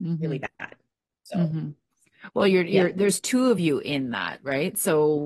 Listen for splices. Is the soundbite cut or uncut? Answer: uncut